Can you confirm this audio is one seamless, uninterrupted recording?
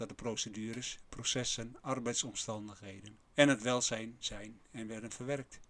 no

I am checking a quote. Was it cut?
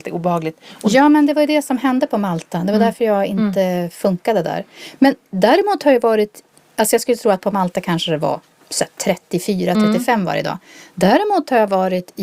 no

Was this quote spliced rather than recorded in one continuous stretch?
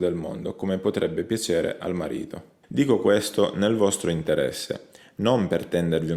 yes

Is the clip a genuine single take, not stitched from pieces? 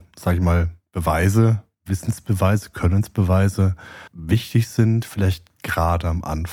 no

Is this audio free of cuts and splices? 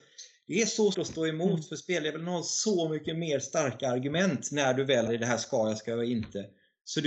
no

